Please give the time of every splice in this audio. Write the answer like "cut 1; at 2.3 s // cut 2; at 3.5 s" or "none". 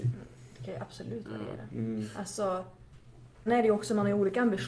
cut 1; at 3.5 s